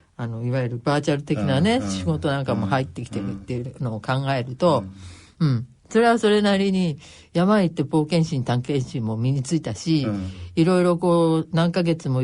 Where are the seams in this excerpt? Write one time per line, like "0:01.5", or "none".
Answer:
none